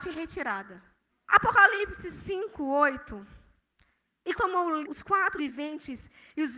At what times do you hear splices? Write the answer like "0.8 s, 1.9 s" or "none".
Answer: 1.1 s, 4.4 s, 4.8 s, 5.4 s

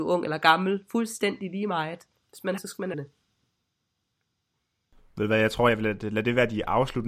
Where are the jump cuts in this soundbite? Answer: 2.6 s, 2.9 s

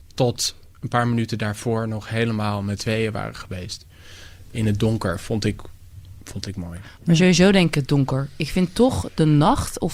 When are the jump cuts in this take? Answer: 2.8 s, 4.5 s

